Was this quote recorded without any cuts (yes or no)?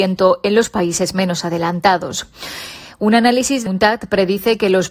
no